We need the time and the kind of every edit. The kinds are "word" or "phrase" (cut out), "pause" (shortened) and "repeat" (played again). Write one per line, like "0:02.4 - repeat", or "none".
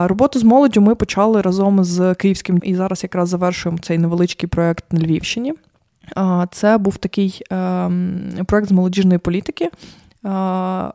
0:02.6 - word